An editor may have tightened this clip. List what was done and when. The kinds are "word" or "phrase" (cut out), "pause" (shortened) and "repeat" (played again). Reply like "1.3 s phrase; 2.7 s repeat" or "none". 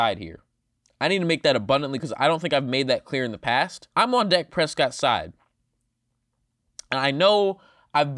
2.0 s word; 3.9 s pause